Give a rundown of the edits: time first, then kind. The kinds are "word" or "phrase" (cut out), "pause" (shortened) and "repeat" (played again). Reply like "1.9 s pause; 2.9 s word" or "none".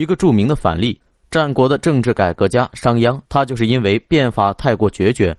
3.3 s pause